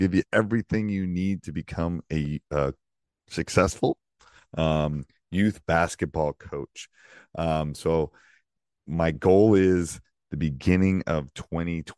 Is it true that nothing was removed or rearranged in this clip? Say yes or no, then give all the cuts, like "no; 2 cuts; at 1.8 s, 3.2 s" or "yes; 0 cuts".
yes; 0 cuts